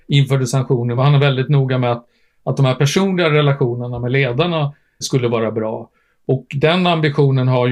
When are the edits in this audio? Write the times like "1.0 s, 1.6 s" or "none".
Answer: 1.0 s, 5.0 s